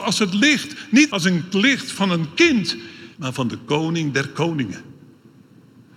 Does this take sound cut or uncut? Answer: cut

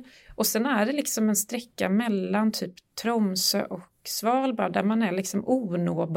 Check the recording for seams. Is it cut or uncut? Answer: uncut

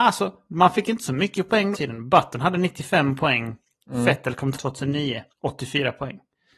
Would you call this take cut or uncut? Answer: cut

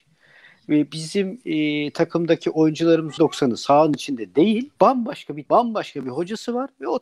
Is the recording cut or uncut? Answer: cut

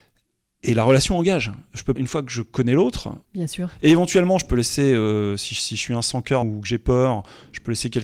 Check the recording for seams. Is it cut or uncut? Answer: cut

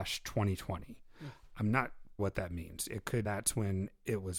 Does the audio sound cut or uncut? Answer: cut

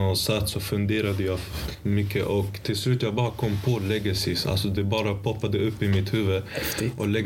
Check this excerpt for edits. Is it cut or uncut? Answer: uncut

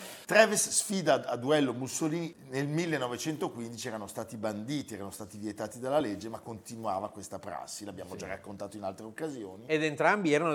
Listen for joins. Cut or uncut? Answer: uncut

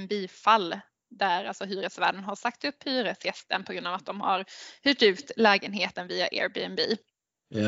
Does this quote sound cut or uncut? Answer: uncut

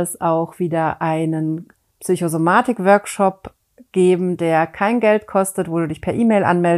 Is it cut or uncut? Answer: uncut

